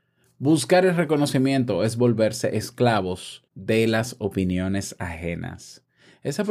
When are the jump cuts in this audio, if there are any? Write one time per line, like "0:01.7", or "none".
0:03.5